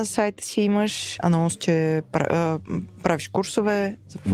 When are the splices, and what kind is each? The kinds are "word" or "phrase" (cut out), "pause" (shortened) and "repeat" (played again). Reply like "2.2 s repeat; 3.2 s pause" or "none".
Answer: 1.2 s word